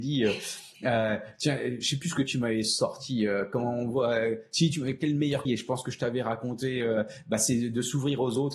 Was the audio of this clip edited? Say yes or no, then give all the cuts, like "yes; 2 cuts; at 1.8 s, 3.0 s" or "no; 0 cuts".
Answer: yes; 1 cut; at 5.5 s